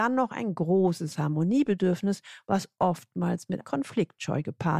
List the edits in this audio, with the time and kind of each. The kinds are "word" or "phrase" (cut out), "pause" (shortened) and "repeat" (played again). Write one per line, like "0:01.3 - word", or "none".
0:03.6 - word